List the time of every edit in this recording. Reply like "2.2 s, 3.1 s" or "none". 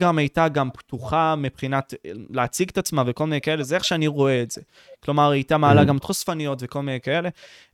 6.0 s